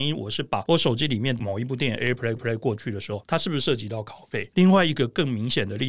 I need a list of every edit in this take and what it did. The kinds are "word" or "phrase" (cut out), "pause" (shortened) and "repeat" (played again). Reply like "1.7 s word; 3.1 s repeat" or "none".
2.4 s repeat